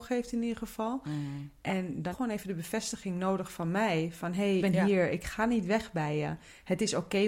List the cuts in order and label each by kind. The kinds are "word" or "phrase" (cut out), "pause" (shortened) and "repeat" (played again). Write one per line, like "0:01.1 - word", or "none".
0:02.1 - phrase
0:04.6 - word